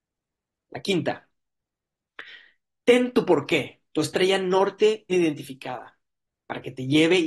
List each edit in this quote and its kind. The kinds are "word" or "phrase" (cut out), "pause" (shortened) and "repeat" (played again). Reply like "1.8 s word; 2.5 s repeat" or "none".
5.1 s word